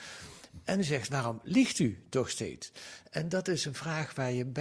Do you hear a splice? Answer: no; 0 cuts

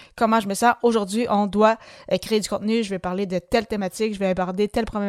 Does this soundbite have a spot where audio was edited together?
no; 0 cuts

